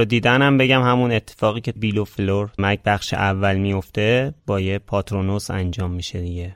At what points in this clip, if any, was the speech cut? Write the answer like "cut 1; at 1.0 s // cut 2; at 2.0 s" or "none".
cut 1; at 1.8 s // cut 2; at 2.6 s